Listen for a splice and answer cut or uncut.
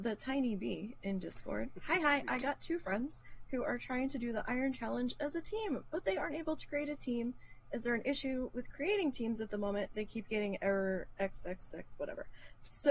uncut